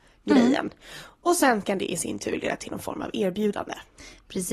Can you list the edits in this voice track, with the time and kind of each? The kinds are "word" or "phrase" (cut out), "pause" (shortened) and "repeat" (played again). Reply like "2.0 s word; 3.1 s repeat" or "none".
none

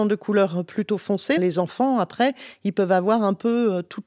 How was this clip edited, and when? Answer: 1.4 s word

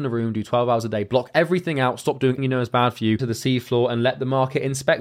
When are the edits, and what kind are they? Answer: 2.4 s word; 3.2 s phrase

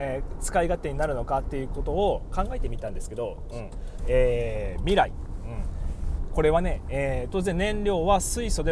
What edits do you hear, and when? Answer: 4.0 s phrase

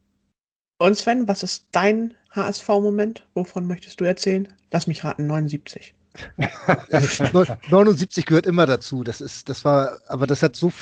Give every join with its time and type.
2.2 s pause

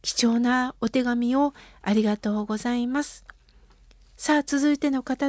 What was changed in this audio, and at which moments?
none

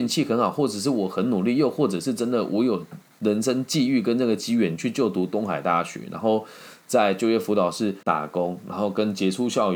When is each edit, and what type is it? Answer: 8.0 s pause

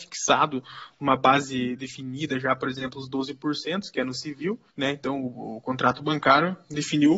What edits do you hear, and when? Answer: 4.7 s pause

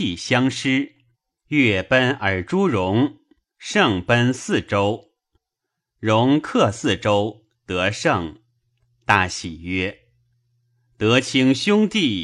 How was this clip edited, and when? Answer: 1.1 s pause

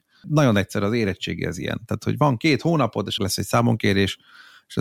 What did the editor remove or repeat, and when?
3.2 s phrase

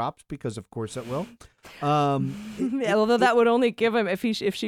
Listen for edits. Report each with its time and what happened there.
none

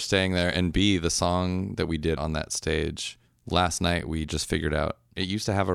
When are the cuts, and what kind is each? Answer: 2.2 s word

